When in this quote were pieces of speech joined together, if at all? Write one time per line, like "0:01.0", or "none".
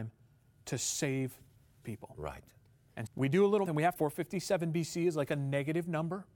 0:01.8
0:03.1
0:03.7
0:04.0